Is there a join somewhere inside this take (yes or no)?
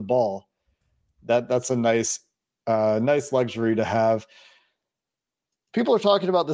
no